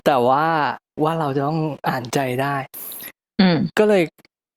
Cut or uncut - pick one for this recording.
cut